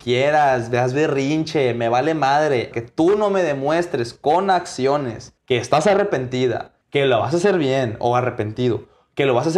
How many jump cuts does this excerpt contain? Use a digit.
3